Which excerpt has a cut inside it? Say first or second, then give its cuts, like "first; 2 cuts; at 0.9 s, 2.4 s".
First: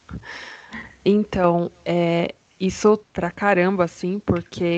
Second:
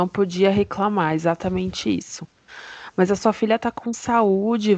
first; 1 cut; at 3.0 s